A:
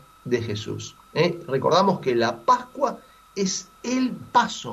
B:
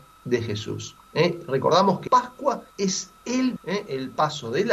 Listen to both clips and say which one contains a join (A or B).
B